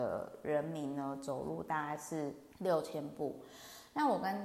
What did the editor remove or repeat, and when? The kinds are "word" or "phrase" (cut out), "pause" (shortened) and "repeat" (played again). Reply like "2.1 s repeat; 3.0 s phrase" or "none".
2.5 s pause